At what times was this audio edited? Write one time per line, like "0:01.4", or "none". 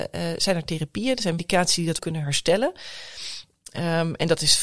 0:01.4
0:02.0